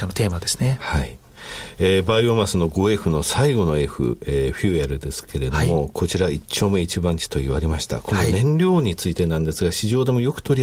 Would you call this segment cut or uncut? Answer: uncut